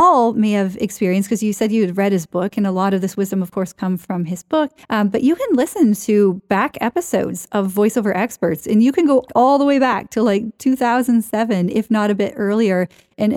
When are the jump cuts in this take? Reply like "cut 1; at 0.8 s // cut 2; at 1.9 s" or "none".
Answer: cut 1; at 4.8 s